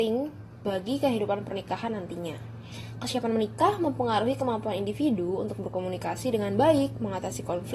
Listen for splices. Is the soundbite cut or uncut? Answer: uncut